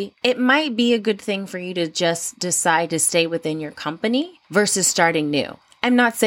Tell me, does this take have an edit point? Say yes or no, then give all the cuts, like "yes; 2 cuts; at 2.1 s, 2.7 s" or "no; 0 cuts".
yes; 1 cut; at 4.4 s